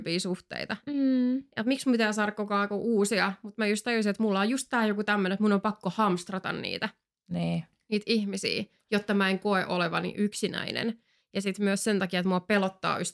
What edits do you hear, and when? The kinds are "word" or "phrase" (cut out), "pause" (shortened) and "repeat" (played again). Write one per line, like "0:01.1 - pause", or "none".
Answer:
none